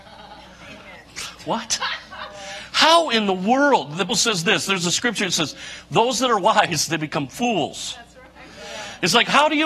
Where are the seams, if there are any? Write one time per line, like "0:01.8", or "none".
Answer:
0:04.1
0:06.9